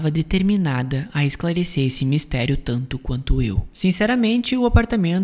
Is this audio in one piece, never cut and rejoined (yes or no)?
no